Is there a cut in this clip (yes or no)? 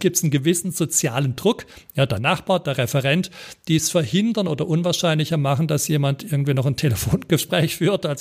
no